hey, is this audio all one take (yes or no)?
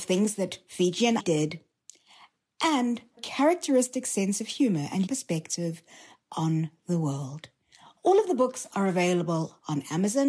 no